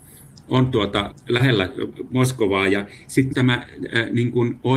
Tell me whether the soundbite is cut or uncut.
cut